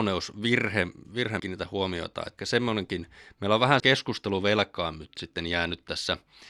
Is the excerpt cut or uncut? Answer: cut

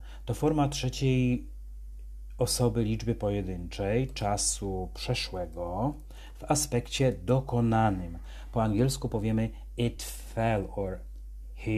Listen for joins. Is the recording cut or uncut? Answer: uncut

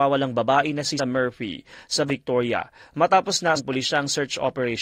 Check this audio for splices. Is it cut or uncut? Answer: cut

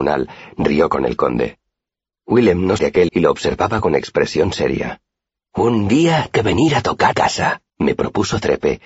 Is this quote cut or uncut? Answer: cut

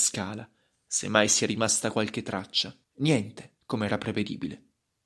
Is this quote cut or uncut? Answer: cut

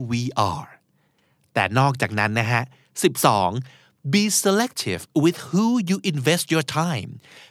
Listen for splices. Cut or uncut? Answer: uncut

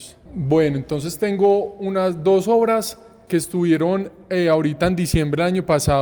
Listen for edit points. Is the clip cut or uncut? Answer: uncut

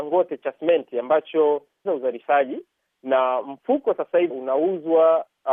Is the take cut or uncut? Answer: cut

